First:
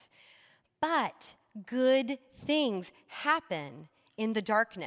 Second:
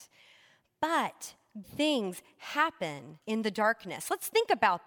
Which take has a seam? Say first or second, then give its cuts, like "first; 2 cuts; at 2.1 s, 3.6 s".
second; 2 cuts; at 1.6 s, 3.2 s